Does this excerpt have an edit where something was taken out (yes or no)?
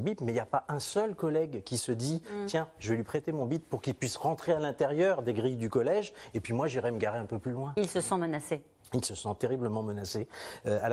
no